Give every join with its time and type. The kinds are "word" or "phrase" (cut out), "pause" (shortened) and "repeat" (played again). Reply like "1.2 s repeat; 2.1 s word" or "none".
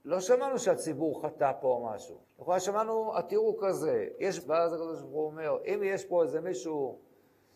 2.2 s pause; 4.4 s word